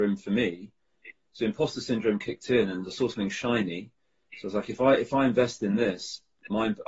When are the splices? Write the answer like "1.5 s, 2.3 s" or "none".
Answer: none